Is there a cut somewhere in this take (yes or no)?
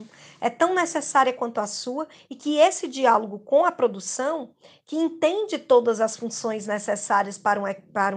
no